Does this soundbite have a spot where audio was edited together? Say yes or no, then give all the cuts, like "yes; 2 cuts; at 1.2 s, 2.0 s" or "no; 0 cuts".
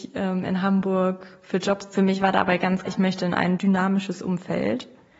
yes; 2 cuts; at 1.9 s, 2.9 s